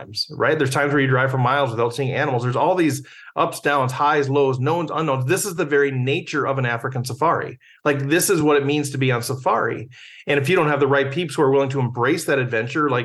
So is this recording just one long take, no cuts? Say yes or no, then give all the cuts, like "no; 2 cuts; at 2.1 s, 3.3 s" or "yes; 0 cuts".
yes; 0 cuts